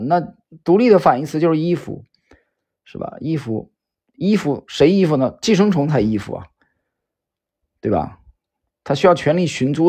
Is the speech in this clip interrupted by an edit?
no; 0 cuts

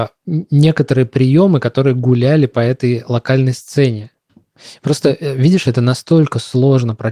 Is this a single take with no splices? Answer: yes; 0 cuts

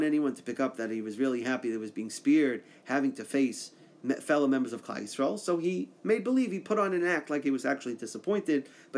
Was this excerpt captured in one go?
yes; 0 cuts

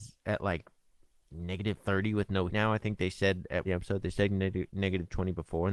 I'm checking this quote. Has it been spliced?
yes; 4 cuts; at 1.3 s, 1.8 s, 2.5 s, 3.7 s

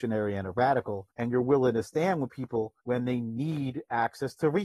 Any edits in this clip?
yes; 2 cuts; at 1.1 s, 2.8 s

